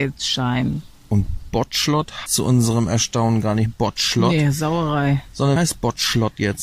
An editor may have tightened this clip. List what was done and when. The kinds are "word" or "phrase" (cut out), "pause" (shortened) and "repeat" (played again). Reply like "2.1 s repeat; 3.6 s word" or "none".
2.3 s word; 3.7 s word; 5.6 s word